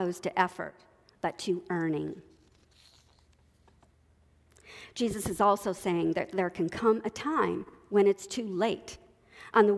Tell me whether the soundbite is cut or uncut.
uncut